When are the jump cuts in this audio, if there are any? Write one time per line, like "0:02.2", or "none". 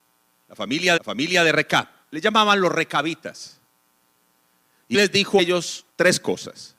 0:01.0
0:02.0
0:04.9
0:05.4
0:05.9